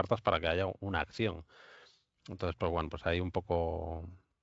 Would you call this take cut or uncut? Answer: uncut